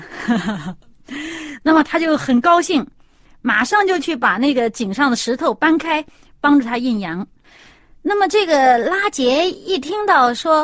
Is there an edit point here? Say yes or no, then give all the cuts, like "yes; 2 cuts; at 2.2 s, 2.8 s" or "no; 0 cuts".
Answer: no; 0 cuts